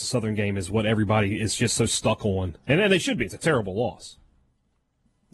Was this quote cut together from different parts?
no; 0 cuts

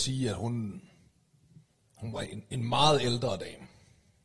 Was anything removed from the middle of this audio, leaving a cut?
no; 0 cuts

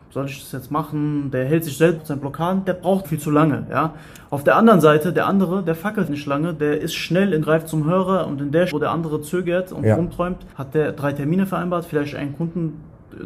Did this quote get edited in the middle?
yes; 6 cuts; at 2.0 s, 3.0 s, 6.1 s, 7.4 s, 8.7 s, 10.5 s

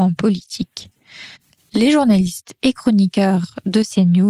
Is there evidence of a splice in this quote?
yes; 1 cut; at 1.4 s

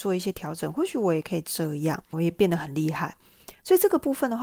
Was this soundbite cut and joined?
yes; 1 cut; at 2.1 s

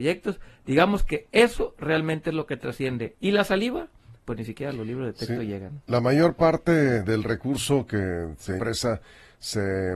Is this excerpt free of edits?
no; 2 cuts; at 4.2 s, 8.6 s

